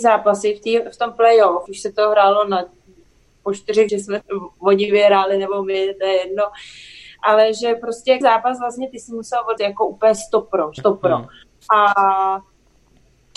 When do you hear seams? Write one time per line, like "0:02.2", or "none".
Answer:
0:01.7
0:03.9
0:04.2
0:08.2
0:09.6
0:10.8

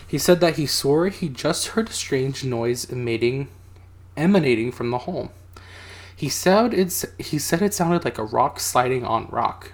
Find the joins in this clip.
none

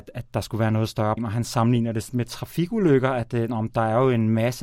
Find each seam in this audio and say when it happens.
0:01.2
0:02.1

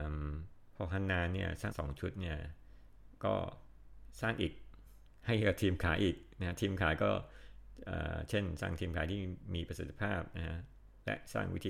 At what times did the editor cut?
0:01.7

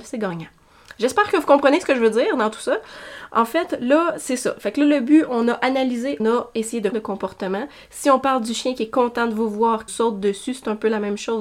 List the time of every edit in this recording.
0:06.2
0:06.9
0:09.9

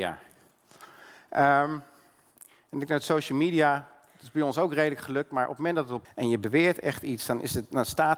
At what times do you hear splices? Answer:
0:06.0

